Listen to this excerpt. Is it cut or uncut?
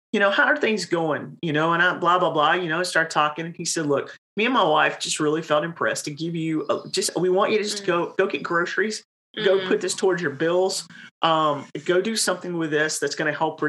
uncut